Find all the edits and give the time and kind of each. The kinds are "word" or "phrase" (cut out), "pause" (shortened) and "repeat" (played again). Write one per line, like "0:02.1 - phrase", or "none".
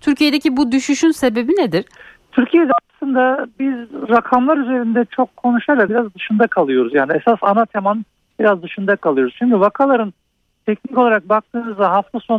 0:02.0 - pause
0:05.9 - phrase